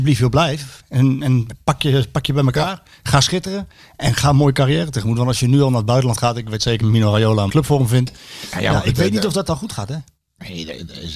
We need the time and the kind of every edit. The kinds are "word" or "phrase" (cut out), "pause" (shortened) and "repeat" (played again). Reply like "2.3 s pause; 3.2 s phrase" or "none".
6.8 s word; 7.5 s word